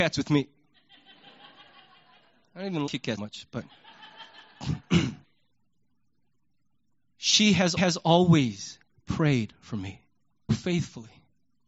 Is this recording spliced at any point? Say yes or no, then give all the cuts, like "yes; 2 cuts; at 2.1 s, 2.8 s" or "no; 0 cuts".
yes; 5 cuts; at 2.9 s, 3.2 s, 5.2 s, 7.8 s, 10.5 s